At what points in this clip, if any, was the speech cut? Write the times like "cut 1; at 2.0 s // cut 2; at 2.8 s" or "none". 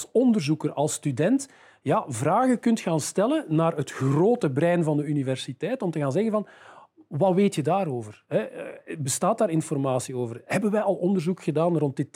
none